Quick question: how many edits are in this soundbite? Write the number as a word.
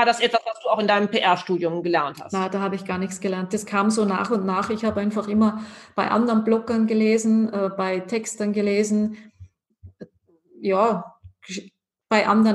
zero